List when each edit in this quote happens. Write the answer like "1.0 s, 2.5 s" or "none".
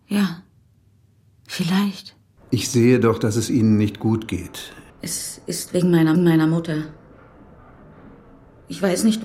4.9 s, 6.1 s

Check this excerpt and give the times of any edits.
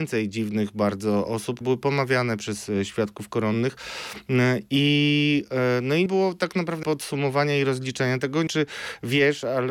1.6 s, 6.1 s, 6.8 s, 8.5 s

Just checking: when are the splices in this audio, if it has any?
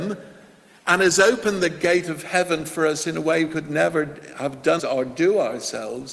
3.5 s, 4.8 s

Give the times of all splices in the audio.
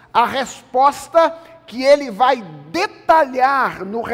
none

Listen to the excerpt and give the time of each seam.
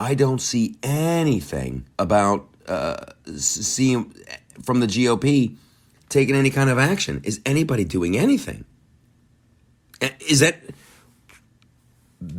1.9 s

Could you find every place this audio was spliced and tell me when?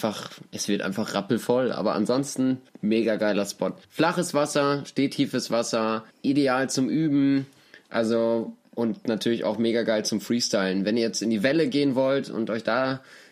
2.7 s, 3.8 s, 6.1 s

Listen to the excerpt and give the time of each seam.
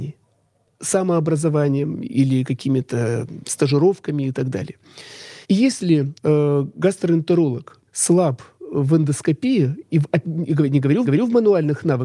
5.4 s, 6.2 s, 7.9 s, 10.2 s, 11.0 s

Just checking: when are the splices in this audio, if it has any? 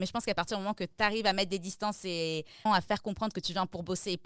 2.7 s

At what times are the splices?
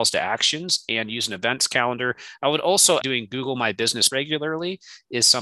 3.0 s, 4.1 s

